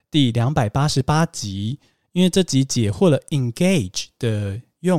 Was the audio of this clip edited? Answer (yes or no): no